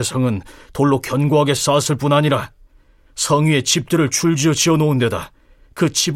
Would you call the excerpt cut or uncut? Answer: uncut